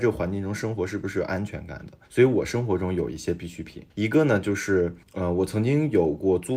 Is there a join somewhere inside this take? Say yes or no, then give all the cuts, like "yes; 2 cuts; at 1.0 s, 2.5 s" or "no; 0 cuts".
yes; 3 cuts; at 2.0 s, 3.9 s, 5.0 s